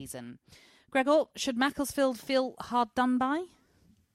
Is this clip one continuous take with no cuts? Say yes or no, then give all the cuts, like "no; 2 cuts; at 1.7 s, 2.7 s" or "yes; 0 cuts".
yes; 0 cuts